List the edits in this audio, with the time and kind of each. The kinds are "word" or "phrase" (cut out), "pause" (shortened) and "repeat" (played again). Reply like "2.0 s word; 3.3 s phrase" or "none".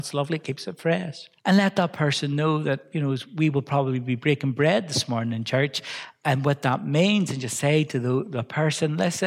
1.4 s pause